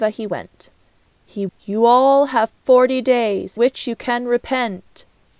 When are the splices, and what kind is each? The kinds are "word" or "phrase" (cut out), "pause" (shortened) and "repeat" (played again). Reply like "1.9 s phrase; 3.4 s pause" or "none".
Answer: 1.5 s word; 3.6 s word